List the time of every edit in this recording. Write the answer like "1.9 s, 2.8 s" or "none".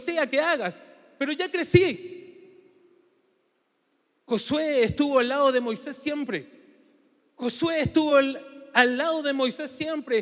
none